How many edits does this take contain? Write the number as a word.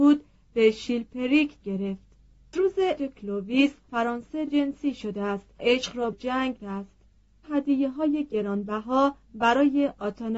nine